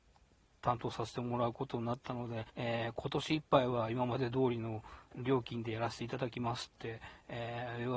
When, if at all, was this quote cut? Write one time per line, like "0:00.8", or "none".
0:02.5